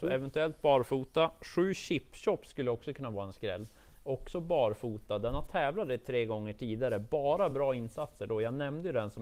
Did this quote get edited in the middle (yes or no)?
no